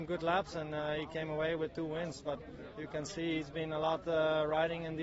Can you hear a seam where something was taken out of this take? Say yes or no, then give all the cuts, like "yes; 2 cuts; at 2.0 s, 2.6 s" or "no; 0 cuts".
no; 0 cuts